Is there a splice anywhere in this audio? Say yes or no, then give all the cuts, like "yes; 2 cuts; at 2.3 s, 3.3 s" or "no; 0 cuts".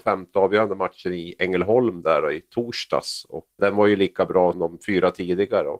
yes; 2 cuts; at 3.6 s, 4.5 s